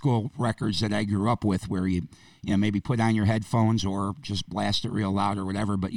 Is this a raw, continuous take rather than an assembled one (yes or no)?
yes